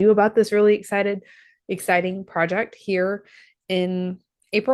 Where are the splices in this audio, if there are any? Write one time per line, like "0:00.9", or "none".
none